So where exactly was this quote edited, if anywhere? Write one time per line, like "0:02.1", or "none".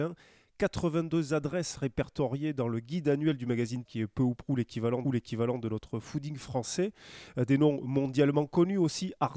0:03.9
0:05.0